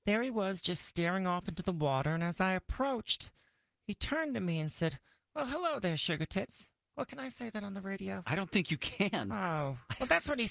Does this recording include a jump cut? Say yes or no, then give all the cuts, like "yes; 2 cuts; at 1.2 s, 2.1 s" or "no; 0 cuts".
no; 0 cuts